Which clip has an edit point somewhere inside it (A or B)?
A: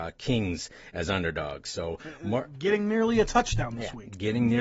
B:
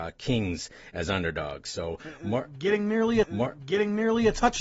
B